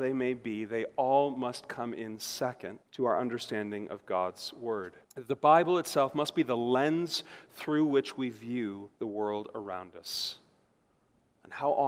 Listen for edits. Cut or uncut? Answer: cut